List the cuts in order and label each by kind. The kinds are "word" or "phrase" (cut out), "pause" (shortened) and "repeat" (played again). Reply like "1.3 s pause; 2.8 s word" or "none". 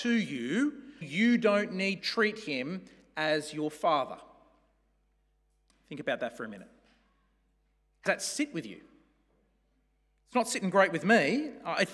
1.0 s word; 2.0 s word; 8.1 s word